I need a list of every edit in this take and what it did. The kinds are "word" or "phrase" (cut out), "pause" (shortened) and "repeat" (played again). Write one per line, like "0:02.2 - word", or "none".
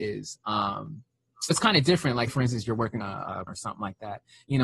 0:01.5 - word
0:02.3 - word
0:03.0 - word
0:03.5 - word